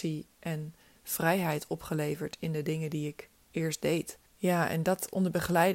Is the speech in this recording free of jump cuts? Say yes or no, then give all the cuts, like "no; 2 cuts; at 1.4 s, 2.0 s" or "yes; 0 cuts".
no; 1 cut; at 4.3 s